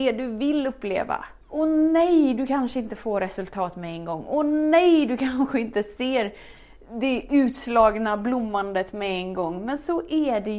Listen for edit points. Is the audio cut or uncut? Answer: cut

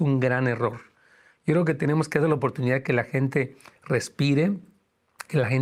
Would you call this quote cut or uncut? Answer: uncut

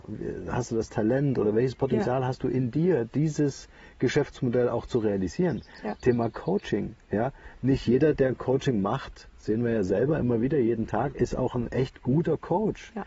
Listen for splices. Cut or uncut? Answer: uncut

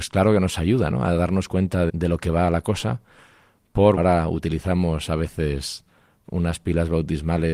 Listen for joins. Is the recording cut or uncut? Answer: cut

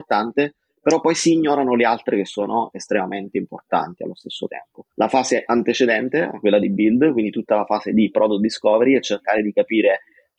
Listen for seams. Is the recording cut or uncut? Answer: cut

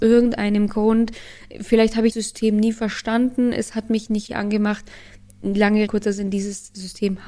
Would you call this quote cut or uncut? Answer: cut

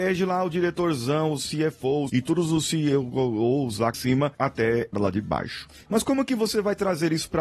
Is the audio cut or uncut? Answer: cut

